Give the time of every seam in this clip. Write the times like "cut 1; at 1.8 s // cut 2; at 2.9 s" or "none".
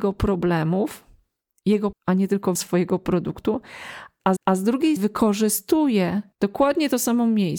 cut 1; at 1.9 s // cut 2; at 2.5 s // cut 3; at 4.4 s // cut 4; at 5.0 s // cut 5; at 6.3 s